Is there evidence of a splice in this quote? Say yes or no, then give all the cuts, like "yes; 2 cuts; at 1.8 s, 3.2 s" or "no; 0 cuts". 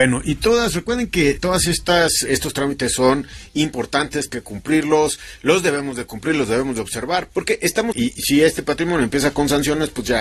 yes; 5 cuts; at 1.4 s, 2.3 s, 4.3 s, 7.3 s, 7.9 s